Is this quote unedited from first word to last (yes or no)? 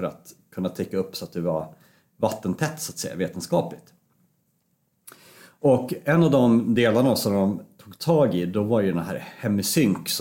yes